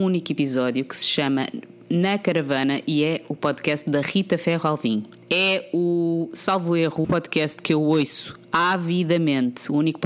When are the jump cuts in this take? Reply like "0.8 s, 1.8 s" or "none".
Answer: 7.0 s